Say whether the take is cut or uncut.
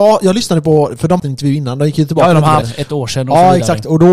cut